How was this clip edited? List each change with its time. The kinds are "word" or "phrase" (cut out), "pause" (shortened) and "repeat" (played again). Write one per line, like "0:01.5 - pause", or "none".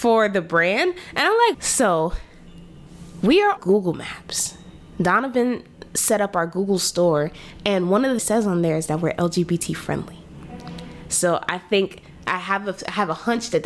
0:01.5 - phrase
0:03.6 - word
0:08.2 - phrase